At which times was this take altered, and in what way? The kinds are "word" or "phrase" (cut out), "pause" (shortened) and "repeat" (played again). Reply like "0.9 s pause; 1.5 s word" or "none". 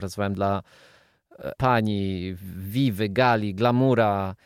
1.6 s word